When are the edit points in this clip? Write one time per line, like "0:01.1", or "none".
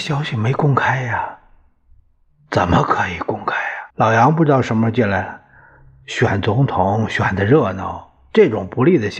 0:03.9